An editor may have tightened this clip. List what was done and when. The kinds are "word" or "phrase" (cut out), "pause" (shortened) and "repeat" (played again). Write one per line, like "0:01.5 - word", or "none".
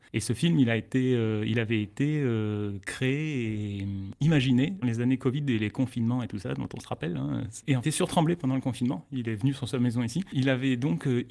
0:04.8 - word
0:07.8 - phrase